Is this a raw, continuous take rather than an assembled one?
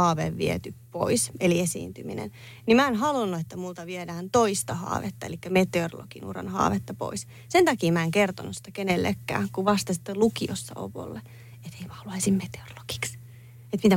yes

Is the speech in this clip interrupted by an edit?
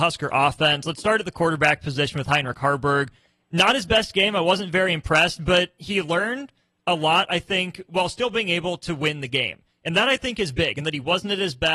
no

